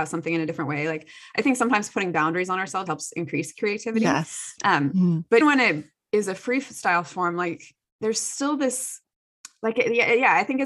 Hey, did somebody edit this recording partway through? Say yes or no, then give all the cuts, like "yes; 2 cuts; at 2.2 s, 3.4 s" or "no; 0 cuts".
yes; 2 cuts; at 2.9 s, 5.4 s